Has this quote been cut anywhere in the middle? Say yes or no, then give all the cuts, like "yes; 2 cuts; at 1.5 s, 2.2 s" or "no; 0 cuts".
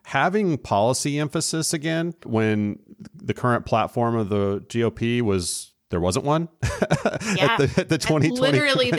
yes; 1 cut; at 2.2 s